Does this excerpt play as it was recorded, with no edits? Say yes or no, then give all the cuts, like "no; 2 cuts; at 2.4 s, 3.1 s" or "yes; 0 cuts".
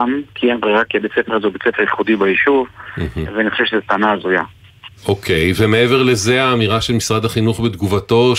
no; 1 cut; at 5.0 s